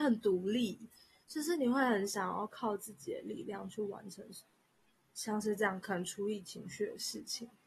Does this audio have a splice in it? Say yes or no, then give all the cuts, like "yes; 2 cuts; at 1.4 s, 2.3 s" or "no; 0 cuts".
no; 0 cuts